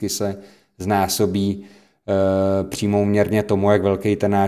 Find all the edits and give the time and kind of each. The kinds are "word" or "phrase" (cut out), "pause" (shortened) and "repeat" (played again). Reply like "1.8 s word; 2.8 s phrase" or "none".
none